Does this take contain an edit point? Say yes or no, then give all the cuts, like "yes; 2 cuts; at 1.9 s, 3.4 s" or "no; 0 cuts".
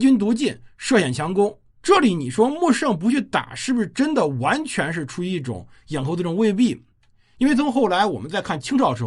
yes; 1 cut; at 1.7 s